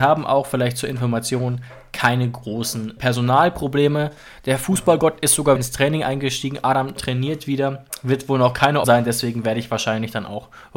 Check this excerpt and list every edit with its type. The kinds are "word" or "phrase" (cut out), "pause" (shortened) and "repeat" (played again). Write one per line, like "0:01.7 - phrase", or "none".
0:03.0 - word
0:05.6 - word
0:07.0 - word
0:08.8 - word